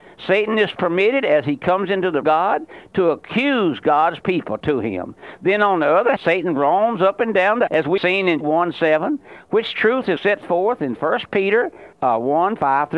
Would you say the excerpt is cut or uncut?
cut